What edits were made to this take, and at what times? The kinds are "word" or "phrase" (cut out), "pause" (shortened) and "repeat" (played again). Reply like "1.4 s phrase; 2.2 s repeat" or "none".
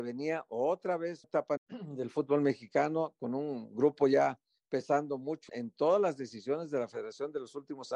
1.2 s word; 1.6 s word; 5.5 s word

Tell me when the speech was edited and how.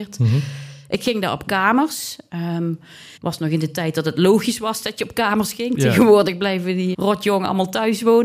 3.2 s pause; 6.9 s word

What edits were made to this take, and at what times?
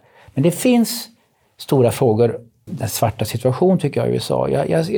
2.7 s word

